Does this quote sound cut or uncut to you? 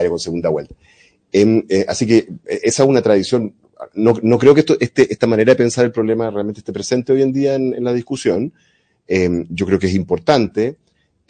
uncut